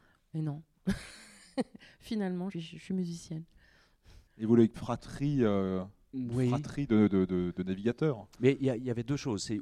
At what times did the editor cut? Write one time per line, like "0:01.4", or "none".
0:02.5
0:04.3
0:04.7
0:07.1